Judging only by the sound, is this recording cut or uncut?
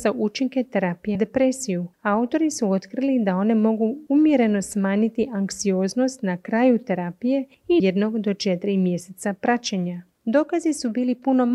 cut